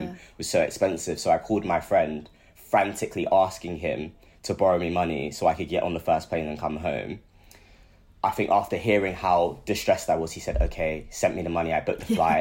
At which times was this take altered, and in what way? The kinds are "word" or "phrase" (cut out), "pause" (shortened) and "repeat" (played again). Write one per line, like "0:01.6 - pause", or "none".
none